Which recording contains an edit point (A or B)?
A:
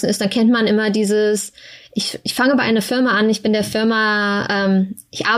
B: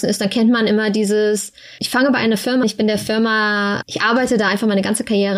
B